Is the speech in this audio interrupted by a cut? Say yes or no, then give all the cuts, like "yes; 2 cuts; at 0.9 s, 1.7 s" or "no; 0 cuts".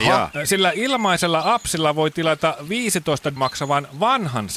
yes; 1 cut; at 3.4 s